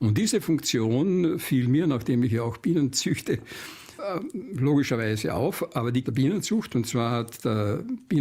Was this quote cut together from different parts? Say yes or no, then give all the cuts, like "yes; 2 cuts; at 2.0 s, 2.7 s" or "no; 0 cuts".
yes; 1 cut; at 6.0 s